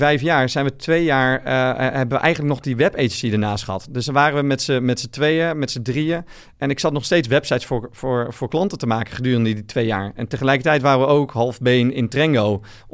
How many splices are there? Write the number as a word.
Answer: zero